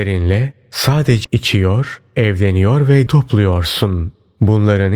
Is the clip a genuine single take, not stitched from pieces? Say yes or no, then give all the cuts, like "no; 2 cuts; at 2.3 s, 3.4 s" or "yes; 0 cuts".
no; 2 cuts; at 1.2 s, 3.1 s